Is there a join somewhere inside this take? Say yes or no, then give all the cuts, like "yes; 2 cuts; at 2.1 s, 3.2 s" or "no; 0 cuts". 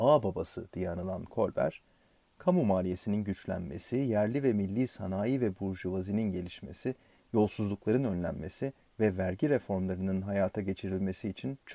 no; 0 cuts